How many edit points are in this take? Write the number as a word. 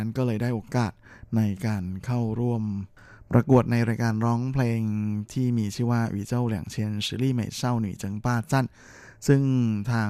zero